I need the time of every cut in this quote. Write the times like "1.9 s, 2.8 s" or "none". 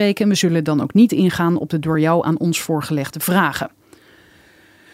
none